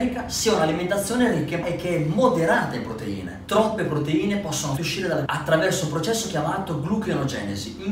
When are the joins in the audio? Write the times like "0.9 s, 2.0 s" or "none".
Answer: 1.6 s, 4.8 s, 5.3 s